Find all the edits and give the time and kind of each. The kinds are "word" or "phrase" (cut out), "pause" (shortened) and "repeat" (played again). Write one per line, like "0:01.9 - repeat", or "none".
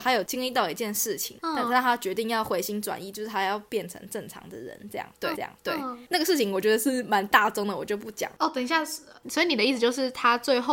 0:03.7 - pause
0:05.3 - repeat